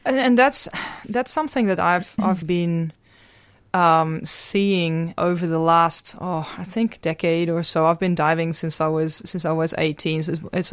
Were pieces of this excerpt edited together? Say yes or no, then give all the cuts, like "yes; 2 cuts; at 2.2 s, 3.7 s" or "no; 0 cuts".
yes; 2 cuts; at 2.4 s, 5.2 s